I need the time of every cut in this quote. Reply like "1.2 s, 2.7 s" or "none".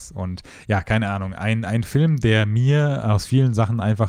none